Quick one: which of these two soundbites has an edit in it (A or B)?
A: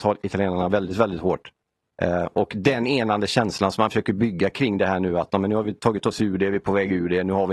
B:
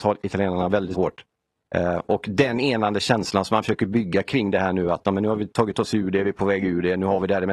B